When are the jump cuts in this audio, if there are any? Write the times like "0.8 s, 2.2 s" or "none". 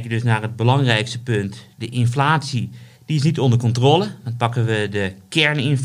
2.9 s